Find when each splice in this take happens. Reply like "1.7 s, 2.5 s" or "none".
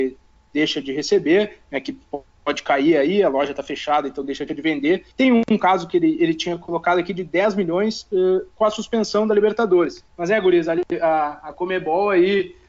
4.5 s, 5.1 s, 10.1 s